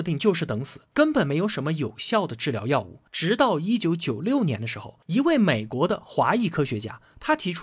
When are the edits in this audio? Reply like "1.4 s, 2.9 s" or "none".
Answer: 3.1 s, 5.0 s